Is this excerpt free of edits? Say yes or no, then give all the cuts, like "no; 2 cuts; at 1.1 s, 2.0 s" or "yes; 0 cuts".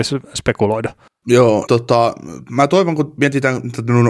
no; 1 cut; at 1.7 s